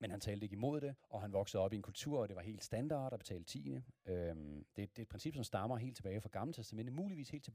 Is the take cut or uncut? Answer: cut